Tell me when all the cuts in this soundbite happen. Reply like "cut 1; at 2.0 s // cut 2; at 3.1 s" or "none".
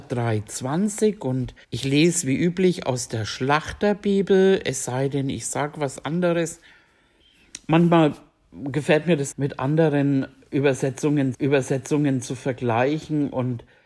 cut 1; at 1.6 s // cut 2; at 9.3 s // cut 3; at 11.3 s